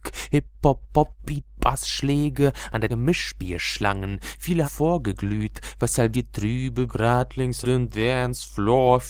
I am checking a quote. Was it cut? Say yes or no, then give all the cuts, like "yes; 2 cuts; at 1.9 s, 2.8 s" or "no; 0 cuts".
yes; 6 cuts; at 1.2 s, 2.9 s, 4.6 s, 6.1 s, 6.9 s, 7.6 s